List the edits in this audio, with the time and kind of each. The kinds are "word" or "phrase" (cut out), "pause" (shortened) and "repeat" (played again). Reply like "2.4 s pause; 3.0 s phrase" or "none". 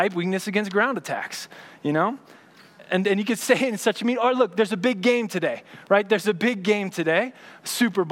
none